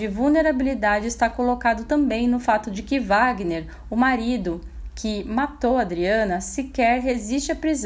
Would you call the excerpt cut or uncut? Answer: uncut